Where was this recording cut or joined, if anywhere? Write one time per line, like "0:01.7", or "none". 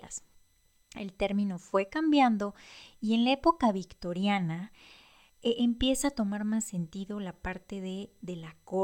none

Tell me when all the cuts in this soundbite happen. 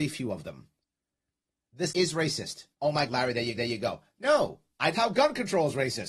0:01.9
0:02.7
0:03.1
0:03.6
0:04.9

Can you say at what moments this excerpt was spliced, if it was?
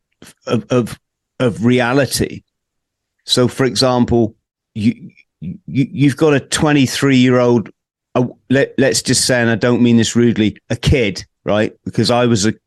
none

